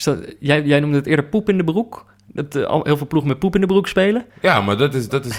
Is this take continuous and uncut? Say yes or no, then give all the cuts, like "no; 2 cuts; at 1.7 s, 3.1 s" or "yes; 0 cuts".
no; 1 cut; at 4.3 s